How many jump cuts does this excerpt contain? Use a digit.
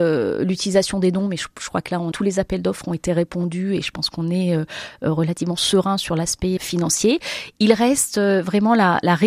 2